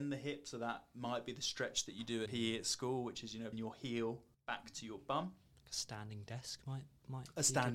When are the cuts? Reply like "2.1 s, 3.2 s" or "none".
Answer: 2.3 s, 3.5 s, 4.3 s